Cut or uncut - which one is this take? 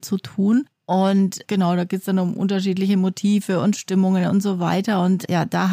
uncut